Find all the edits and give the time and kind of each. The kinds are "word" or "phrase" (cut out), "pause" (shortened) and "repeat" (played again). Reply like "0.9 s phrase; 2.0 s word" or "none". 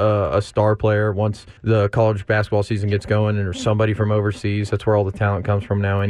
1.6 s pause